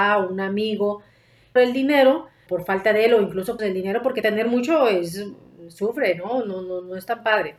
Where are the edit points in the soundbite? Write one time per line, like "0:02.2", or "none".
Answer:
0:01.6
0:02.5
0:03.6
0:04.2